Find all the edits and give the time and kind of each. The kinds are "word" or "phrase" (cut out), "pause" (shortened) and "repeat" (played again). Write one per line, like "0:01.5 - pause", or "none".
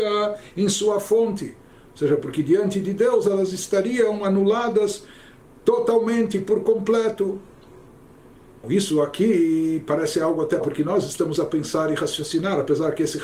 0:08.6 - word
0:10.6 - word
0:11.4 - word

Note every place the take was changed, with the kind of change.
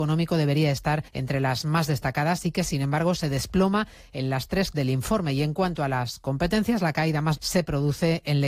0:01.1 - pause
0:04.7 - word
0:07.4 - word

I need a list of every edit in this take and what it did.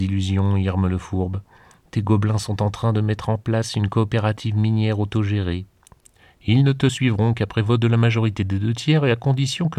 0:06.0 - pause

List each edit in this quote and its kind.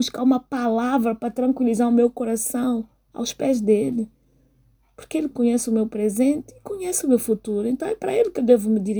0:05.3 - phrase

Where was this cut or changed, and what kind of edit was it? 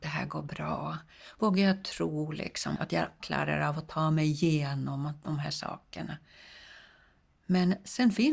0:02.8 - word
0:03.2 - word

